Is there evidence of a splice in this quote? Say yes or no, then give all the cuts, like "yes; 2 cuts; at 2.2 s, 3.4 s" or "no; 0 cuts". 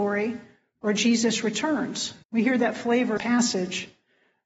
yes; 2 cuts; at 2.2 s, 3.2 s